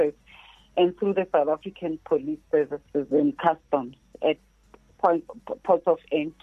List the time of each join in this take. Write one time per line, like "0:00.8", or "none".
none